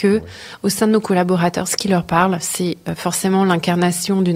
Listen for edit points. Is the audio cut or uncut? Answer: uncut